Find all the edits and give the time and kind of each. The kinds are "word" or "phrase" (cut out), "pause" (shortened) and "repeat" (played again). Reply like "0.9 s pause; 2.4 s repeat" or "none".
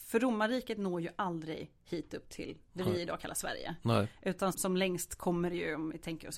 4.5 s word